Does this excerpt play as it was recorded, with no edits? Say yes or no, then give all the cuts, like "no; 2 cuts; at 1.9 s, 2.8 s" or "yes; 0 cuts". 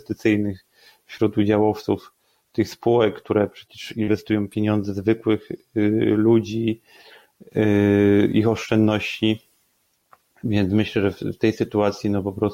yes; 0 cuts